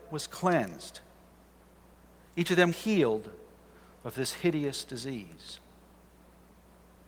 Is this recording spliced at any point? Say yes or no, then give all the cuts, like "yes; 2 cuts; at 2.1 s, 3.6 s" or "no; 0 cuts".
yes; 1 cut; at 2.7 s